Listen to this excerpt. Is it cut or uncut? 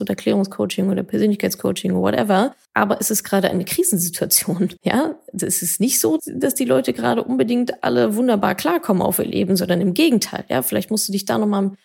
cut